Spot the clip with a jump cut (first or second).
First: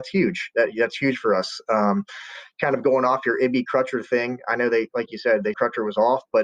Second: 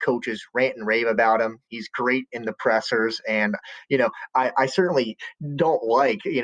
first